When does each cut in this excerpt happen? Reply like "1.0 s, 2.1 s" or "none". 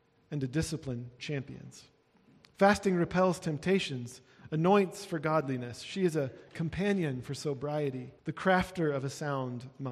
1.2 s, 8.2 s